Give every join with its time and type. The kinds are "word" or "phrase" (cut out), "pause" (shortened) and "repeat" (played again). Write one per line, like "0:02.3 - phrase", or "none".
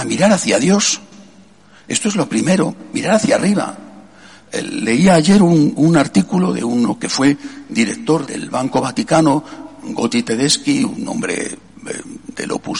0:08.3 - word